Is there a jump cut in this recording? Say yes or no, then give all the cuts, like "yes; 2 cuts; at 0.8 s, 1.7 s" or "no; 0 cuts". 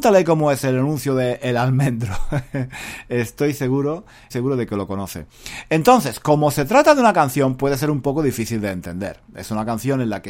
yes; 1 cut; at 4.3 s